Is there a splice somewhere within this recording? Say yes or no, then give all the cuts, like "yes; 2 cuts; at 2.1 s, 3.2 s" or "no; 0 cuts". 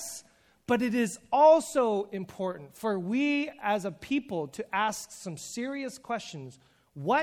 no; 0 cuts